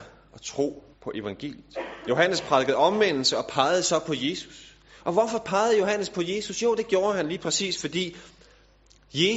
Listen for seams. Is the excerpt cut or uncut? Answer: cut